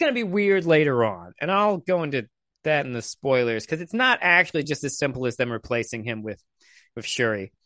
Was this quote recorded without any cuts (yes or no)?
yes